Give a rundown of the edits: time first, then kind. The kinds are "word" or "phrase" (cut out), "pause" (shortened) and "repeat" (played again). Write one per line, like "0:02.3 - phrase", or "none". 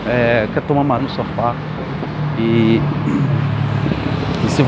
0:01.0 - phrase